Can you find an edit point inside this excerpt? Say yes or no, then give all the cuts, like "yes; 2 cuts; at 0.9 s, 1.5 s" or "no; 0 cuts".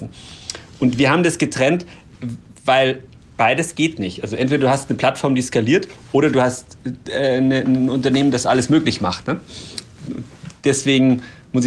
no; 0 cuts